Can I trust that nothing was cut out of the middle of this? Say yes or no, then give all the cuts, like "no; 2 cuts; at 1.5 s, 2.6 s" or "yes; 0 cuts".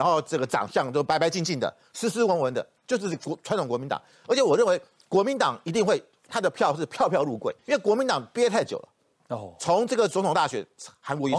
no; 1 cut; at 7.6 s